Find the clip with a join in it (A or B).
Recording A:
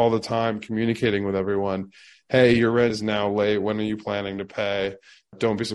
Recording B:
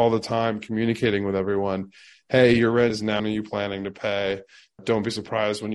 B